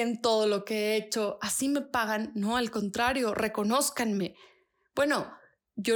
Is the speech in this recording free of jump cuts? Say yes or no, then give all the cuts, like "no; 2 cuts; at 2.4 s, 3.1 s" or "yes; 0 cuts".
yes; 0 cuts